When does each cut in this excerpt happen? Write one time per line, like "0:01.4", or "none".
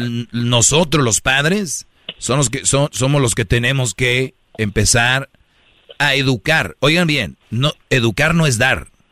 0:06.0
0:07.4